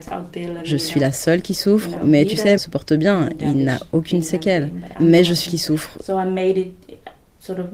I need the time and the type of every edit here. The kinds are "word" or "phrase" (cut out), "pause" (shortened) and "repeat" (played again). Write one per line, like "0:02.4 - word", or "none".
0:02.6 - phrase
0:05.5 - word

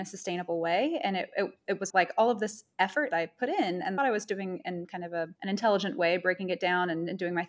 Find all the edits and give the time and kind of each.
0:01.9 - word
0:03.1 - phrase
0:04.0 - phrase
0:05.4 - pause

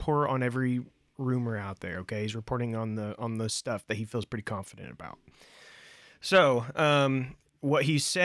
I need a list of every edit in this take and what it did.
none

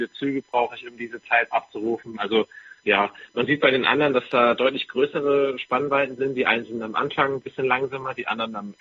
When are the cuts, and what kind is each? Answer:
0:01.5 - word
0:02.8 - pause

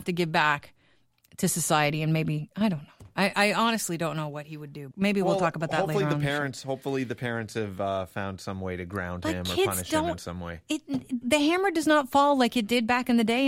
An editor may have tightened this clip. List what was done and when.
0:04.9 - word
0:11.2 - word

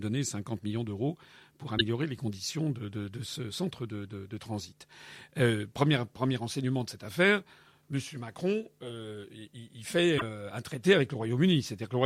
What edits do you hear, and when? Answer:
none

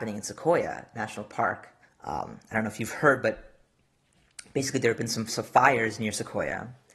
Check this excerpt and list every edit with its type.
0:01.8 - pause

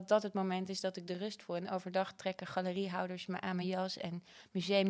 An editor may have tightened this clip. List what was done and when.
none

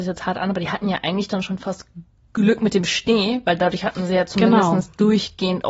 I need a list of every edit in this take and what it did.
none

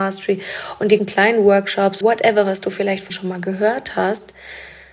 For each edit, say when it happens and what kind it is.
0:01.0 - word
0:02.0 - word
0:03.1 - word

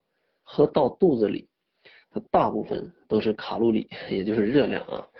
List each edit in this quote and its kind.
none

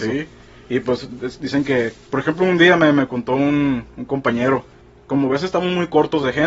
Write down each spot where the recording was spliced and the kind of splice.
none

